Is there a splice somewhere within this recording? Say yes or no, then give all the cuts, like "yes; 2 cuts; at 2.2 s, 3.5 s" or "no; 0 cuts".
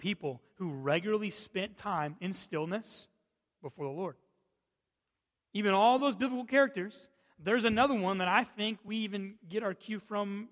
no; 0 cuts